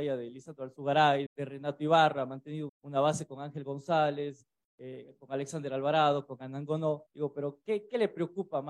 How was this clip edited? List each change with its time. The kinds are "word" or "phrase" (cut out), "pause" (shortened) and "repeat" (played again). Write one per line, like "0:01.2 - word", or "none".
0:01.3 - word
0:02.7 - word
0:07.1 - pause